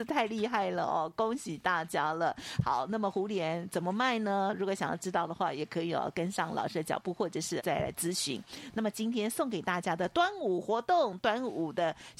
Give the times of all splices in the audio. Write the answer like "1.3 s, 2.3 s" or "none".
7.6 s